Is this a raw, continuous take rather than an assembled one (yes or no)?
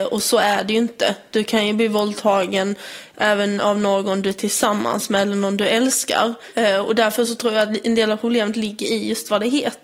yes